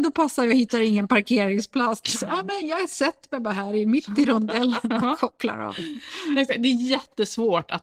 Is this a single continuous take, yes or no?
yes